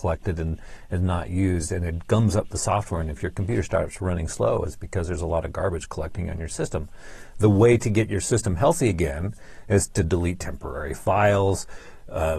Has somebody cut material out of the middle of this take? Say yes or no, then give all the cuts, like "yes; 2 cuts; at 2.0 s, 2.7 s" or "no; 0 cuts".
no; 0 cuts